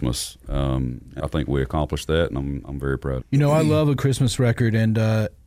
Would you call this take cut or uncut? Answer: cut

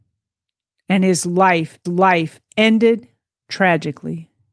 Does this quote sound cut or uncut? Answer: cut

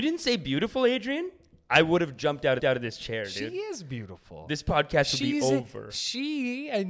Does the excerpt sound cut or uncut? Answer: cut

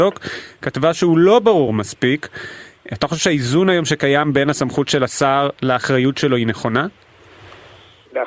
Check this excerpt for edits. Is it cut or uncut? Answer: uncut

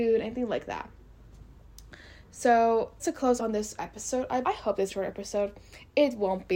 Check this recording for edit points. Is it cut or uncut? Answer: cut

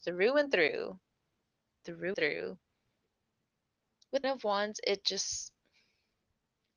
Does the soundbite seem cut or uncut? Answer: cut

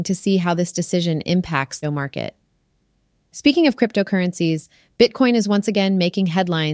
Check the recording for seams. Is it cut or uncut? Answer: cut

